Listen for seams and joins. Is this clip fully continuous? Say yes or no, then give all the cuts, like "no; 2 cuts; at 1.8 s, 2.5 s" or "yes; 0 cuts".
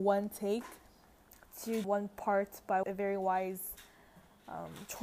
no; 2 cuts; at 1.8 s, 2.8 s